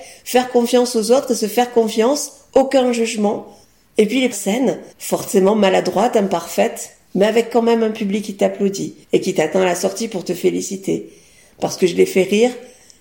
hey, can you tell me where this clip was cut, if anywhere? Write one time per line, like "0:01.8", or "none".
0:03.6
0:04.3
0:04.9
0:09.0

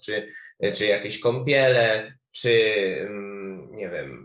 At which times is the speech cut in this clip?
none

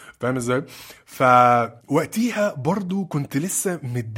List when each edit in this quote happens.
0:01.8

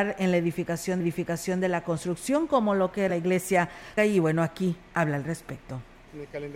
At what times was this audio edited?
0:01.0
0:03.1
0:04.0

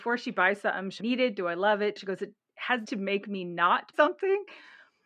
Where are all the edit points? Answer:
0:01.0
0:02.0
0:02.8
0:03.9

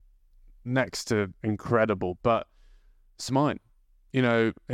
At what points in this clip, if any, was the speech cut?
0:03.3

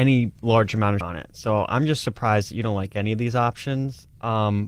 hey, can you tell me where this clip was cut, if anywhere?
0:01.0

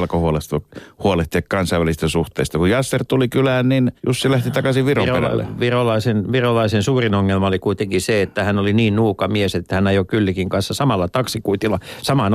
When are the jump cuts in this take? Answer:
0:04.0

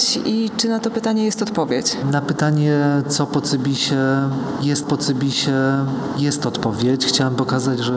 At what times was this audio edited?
0:04.8

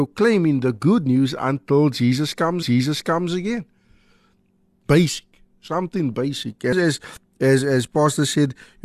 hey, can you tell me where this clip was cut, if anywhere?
0:02.6

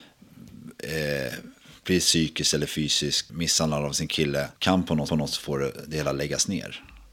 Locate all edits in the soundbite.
0:03.3
0:04.6
0:05.1

